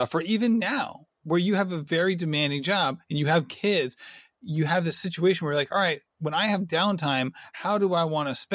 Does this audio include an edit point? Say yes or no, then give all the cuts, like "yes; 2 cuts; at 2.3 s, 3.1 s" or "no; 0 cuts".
no; 0 cuts